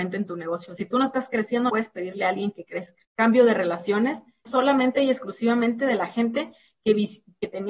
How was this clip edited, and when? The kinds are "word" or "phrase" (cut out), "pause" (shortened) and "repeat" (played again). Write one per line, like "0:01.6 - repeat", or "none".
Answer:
0:01.7 - word
0:03.0 - pause
0:04.4 - phrase